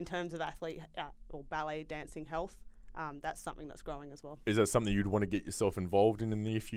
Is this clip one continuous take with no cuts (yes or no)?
yes